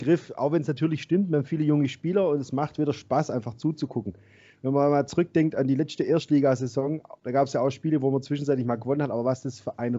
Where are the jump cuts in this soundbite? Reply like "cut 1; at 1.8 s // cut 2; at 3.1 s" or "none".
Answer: none